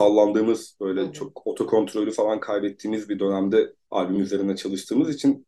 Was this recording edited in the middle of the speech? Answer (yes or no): no